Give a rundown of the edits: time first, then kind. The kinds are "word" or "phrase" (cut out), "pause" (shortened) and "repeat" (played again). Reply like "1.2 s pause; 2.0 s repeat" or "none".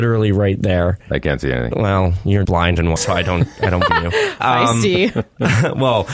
2.4 s word; 3.0 s word; 3.9 s word; 4.4 s word